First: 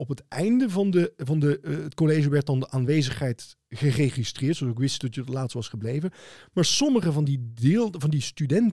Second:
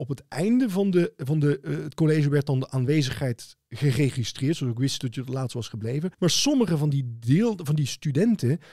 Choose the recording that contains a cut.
second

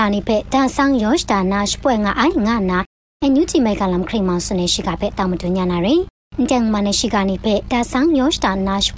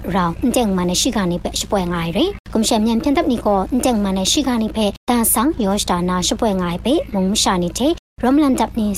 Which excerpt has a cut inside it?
second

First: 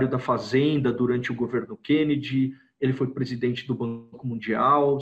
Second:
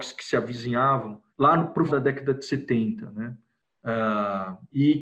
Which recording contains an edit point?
second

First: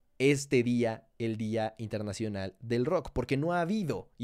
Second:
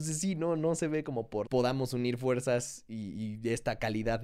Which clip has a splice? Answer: second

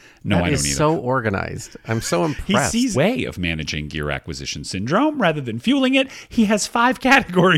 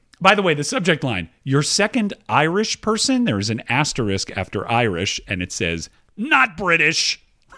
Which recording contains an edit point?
first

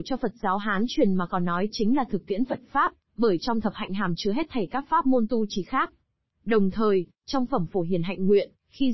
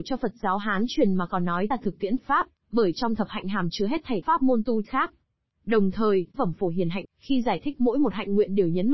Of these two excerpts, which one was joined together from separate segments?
second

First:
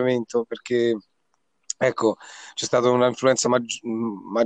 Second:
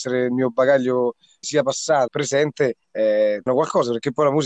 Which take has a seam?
second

